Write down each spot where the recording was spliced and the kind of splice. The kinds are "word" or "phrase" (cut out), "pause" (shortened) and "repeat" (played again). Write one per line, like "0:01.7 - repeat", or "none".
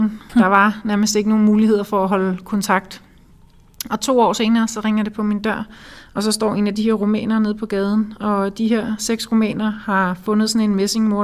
none